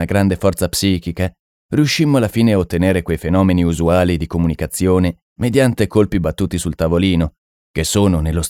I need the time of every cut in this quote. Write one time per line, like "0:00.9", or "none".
none

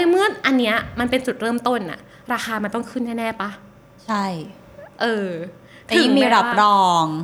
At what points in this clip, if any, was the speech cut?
none

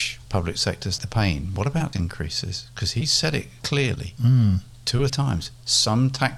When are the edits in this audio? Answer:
0:01.0
0:01.9
0:03.6
0:05.1

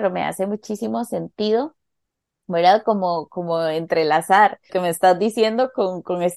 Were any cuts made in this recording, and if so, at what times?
0:04.7

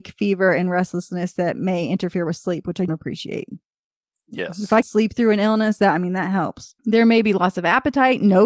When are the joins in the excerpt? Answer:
0:02.9
0:04.8
0:06.8

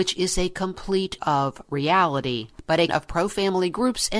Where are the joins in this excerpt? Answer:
0:01.2
0:02.9

